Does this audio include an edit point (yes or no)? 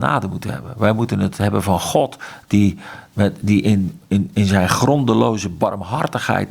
no